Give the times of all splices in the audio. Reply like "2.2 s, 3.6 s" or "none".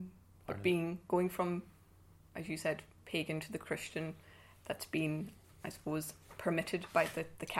none